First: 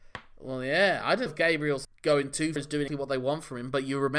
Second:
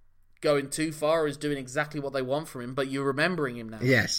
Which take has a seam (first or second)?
first